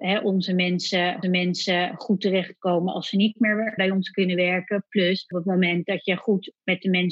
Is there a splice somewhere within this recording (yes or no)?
yes